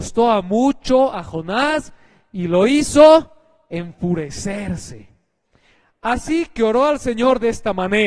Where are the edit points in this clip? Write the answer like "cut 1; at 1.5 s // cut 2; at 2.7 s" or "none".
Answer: none